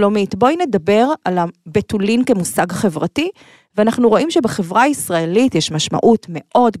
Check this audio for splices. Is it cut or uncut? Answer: uncut